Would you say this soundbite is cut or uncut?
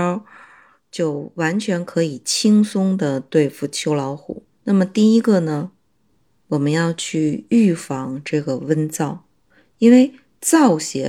cut